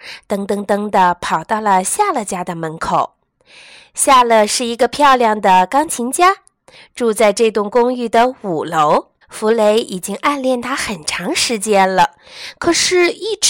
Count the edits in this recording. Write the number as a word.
one